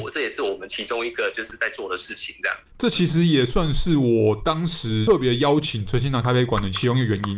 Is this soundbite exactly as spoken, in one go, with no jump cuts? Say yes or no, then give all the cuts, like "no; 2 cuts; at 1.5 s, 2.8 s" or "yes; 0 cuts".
no; 1 cut; at 2.7 s